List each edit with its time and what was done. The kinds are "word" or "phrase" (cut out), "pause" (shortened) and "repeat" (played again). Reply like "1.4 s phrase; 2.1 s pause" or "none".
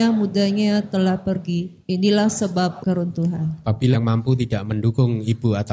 1.8 s pause; 2.8 s word; 3.9 s word